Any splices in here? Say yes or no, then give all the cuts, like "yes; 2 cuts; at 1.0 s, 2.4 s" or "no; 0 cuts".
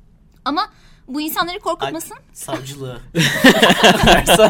no; 0 cuts